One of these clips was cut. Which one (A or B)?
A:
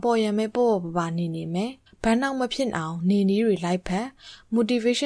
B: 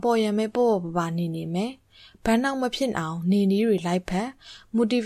A